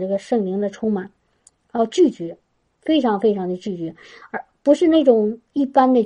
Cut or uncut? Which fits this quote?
uncut